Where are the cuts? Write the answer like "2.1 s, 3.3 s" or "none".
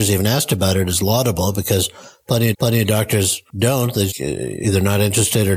2.5 s, 3.5 s, 4.1 s